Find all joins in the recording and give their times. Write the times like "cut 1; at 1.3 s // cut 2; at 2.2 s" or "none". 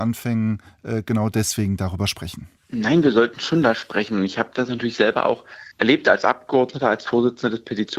cut 1; at 2.6 s // cut 2; at 5.7 s